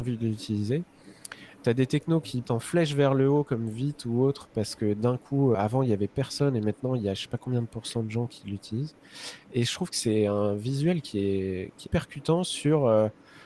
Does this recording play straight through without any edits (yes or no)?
no